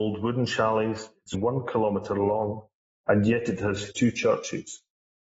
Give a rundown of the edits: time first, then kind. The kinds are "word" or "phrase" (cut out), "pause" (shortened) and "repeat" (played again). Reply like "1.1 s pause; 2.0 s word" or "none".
1.3 s word; 3.9 s phrase